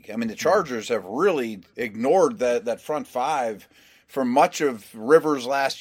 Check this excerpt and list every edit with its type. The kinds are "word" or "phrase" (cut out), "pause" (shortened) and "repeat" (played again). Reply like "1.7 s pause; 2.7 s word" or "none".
none